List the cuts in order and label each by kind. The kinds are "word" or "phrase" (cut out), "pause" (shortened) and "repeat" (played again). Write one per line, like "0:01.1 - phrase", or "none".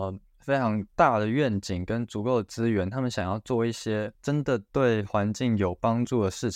0:04.1 - pause